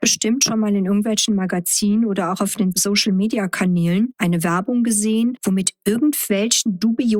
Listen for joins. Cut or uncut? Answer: uncut